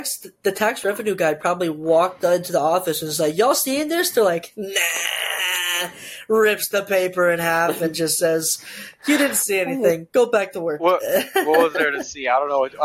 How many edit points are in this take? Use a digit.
0